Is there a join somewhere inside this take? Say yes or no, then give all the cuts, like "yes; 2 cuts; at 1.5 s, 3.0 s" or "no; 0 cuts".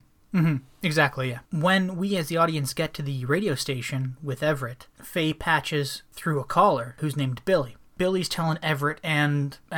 yes; 2 cuts; at 1.5 s, 7.9 s